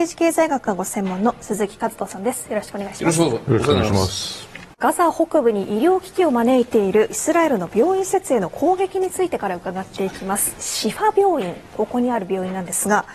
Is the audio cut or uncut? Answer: cut